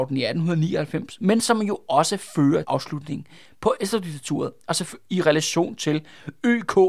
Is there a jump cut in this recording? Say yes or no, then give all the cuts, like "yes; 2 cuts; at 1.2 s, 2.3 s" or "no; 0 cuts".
yes; 1 cut; at 2.6 s